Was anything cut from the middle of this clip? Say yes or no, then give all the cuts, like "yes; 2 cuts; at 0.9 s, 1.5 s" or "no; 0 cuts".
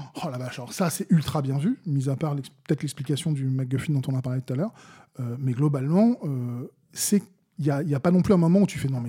no; 0 cuts